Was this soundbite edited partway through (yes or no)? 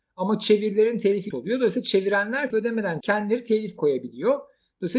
yes